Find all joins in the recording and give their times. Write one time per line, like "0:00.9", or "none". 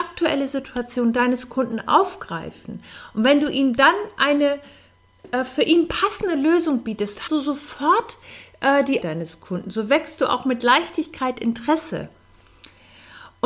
0:07.3
0:09.0